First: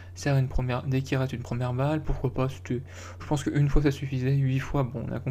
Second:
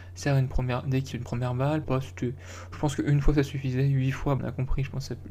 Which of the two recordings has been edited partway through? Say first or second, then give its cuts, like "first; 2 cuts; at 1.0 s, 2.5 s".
second; 3 cuts; at 1.1 s, 1.8 s, 4.4 s